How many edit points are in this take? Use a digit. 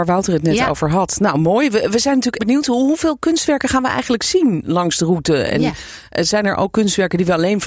1